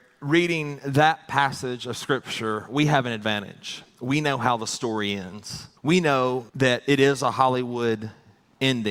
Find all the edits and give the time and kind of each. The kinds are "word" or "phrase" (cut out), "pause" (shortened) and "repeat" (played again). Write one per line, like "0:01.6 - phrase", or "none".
0:05.8 - pause
0:06.5 - pause